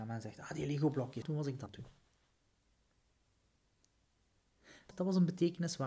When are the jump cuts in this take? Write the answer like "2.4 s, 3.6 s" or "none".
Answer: 1.2 s, 1.7 s, 4.9 s